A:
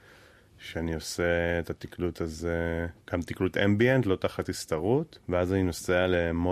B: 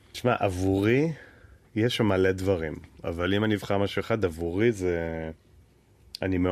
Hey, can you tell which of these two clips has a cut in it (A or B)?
A